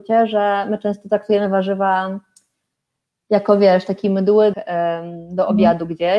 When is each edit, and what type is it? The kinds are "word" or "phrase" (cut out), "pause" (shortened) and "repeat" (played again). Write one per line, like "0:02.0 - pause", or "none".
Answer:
0:04.5 - word